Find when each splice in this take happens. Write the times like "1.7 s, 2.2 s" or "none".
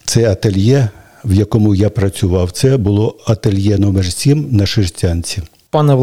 none

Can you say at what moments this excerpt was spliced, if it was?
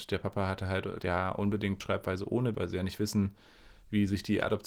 1.0 s, 1.8 s, 2.5 s

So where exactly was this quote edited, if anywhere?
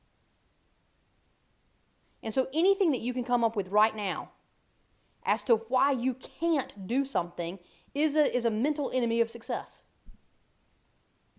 none

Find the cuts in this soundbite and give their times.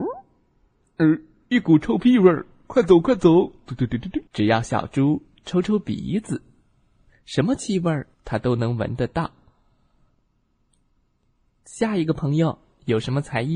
4.3 s, 8.1 s

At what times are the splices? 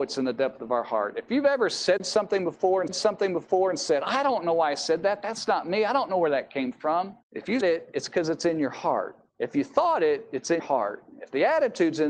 2.9 s, 7.2 s, 7.6 s, 9.3 s, 10.6 s

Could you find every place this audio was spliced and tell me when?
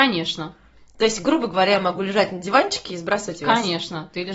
none

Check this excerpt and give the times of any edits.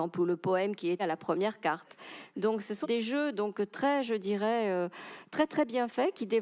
1.0 s, 2.8 s

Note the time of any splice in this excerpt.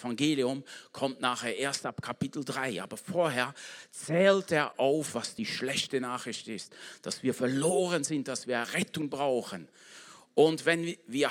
none

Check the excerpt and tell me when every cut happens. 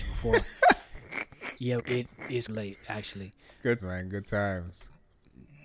1.8 s, 2.5 s, 3.8 s

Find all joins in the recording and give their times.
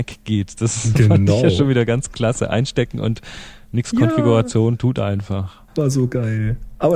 5.7 s

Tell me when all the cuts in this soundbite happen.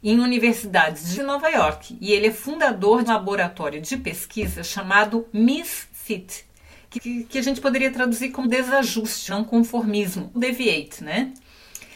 1.1 s, 3.1 s, 6.9 s, 8.4 s, 9.3 s, 10.3 s

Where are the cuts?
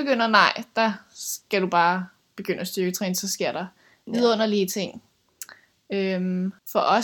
none

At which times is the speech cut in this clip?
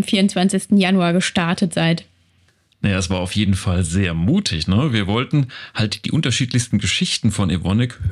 none

